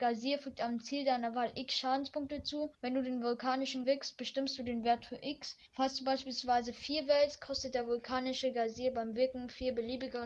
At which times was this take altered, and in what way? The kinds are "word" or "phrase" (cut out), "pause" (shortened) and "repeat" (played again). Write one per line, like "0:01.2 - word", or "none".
0:02.7 - pause
0:03.8 - word
0:05.7 - pause